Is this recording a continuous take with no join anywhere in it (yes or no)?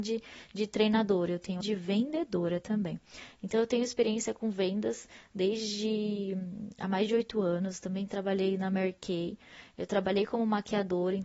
no